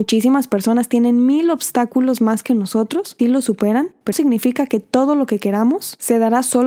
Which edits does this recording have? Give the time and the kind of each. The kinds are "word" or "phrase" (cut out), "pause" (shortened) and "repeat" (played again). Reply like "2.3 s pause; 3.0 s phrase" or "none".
3.2 s phrase; 4.1 s word